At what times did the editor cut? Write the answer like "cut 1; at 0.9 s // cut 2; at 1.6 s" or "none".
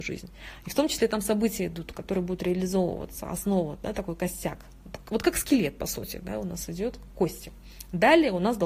none